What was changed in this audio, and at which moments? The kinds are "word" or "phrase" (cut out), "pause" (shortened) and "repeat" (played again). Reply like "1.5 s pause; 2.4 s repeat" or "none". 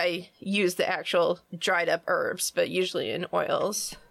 1.5 s pause